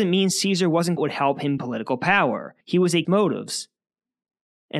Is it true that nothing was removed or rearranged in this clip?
no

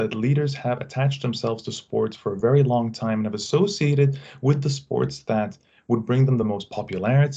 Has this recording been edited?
no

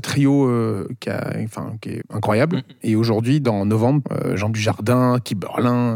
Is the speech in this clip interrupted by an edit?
yes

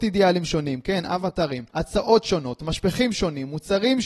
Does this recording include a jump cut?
yes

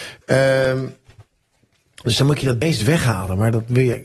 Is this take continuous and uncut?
yes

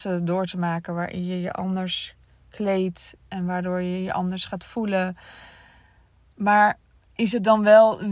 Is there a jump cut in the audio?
no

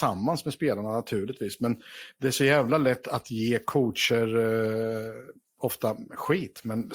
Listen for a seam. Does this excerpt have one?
no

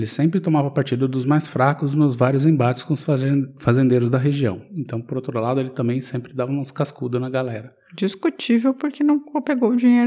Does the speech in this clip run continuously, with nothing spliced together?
yes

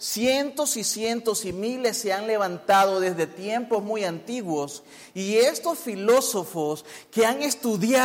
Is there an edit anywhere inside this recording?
no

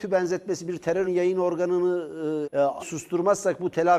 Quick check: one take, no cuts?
no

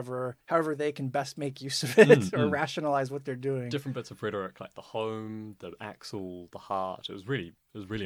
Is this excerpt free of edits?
yes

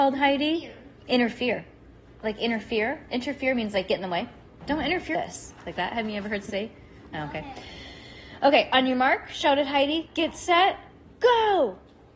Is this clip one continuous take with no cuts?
no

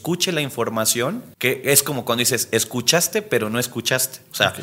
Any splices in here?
yes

